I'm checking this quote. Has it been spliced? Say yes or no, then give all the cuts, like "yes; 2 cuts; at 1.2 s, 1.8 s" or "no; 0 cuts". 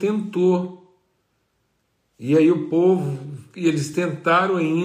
no; 0 cuts